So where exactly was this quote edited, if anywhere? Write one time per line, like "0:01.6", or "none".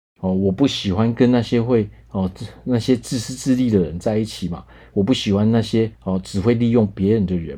0:05.9